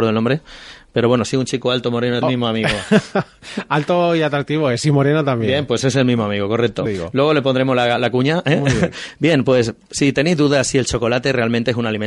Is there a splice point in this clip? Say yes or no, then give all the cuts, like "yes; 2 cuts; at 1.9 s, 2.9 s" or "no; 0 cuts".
yes; 2 cuts; at 2.2 s, 6.9 s